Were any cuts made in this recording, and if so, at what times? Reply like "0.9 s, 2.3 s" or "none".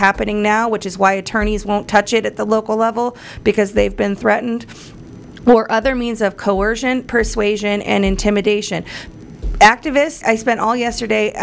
10.2 s

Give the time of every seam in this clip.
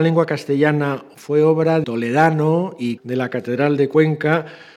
1.1 s, 1.8 s, 3.0 s

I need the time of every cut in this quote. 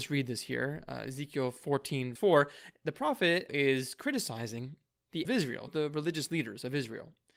2.2 s, 3.5 s, 5.2 s, 5.7 s

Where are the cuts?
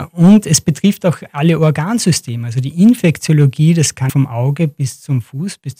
4.1 s

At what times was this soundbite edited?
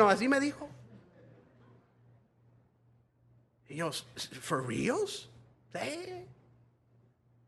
none

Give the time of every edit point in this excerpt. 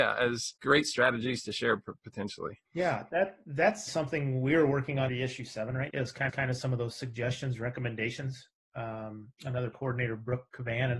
2.6 s, 3.9 s, 5.1 s, 5.9 s, 6.3 s, 9.7 s

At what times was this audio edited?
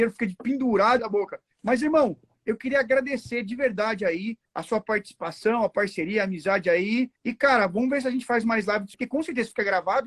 1.0 s, 1.5 s, 4.5 s, 7.2 s, 8.9 s

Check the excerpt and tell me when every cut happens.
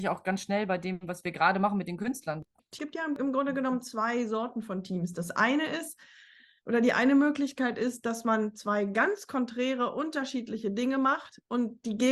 none

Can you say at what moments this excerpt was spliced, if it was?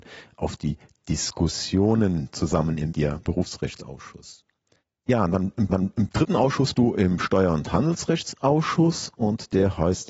2.9 s, 3.3 s, 5.7 s, 6.7 s

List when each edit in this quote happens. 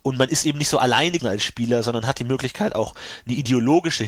1.2 s

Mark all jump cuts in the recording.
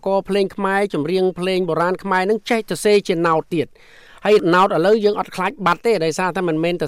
none

